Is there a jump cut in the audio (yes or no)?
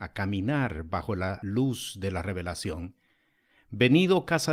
no